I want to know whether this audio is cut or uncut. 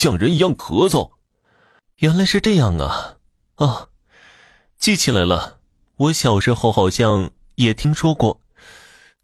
uncut